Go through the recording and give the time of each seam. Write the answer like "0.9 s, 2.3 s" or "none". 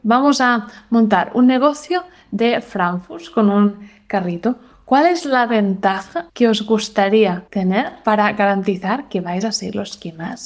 none